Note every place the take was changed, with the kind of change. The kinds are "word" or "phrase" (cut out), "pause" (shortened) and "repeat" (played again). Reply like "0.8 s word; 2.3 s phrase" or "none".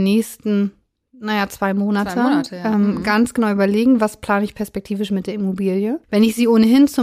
none